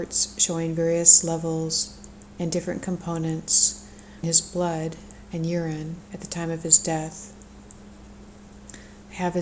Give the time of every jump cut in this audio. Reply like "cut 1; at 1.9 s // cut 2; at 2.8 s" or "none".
cut 1; at 4.2 s